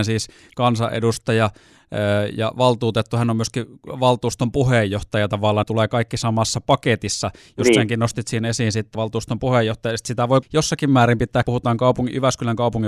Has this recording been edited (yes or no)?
yes